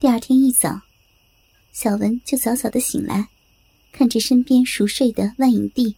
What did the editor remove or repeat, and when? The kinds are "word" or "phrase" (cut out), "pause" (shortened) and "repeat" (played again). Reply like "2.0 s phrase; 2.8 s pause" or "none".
3.8 s pause

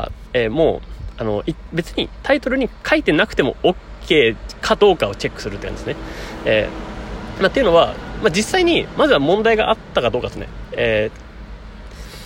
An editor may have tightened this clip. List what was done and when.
none

